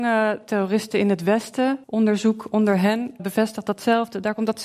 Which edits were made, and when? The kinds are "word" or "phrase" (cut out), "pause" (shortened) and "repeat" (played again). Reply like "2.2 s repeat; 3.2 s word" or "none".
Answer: 1.8 s pause; 3.2 s word